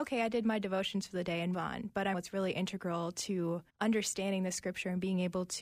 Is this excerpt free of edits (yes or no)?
no